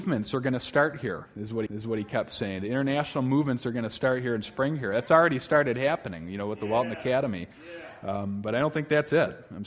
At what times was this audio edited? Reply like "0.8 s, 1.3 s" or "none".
1.7 s